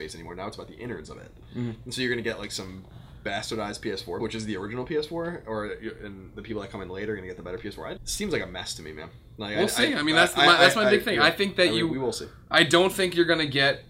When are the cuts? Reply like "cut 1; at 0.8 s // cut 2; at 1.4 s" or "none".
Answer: cut 1; at 4.2 s // cut 2; at 8.0 s